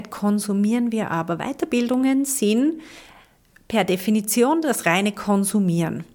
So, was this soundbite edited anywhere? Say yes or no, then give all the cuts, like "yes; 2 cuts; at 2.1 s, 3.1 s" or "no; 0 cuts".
no; 0 cuts